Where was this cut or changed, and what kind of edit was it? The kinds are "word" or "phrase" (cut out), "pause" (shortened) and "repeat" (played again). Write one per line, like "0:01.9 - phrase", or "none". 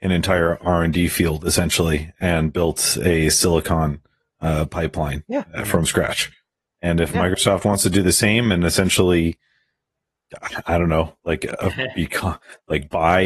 none